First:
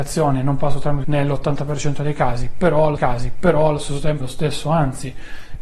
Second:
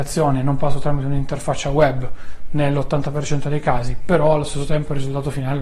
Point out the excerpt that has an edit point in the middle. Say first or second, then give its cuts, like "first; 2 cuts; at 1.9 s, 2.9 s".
first; 3 cuts; at 1.0 s, 3.0 s, 4.2 s